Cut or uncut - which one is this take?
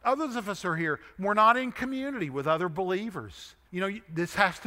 cut